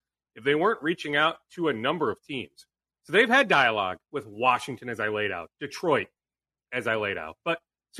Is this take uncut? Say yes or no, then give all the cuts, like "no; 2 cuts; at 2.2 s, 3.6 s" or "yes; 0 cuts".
yes; 0 cuts